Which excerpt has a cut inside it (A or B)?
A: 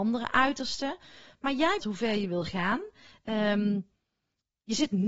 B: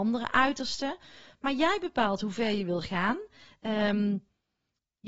A